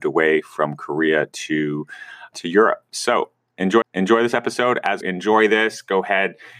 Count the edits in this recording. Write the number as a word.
three